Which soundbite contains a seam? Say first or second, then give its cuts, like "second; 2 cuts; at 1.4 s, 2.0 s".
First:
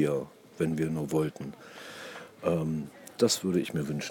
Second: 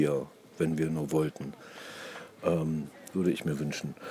second; 1 cut; at 3.1 s